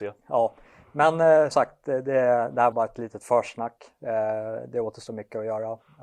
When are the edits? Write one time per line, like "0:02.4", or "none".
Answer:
0:01.5
0:02.7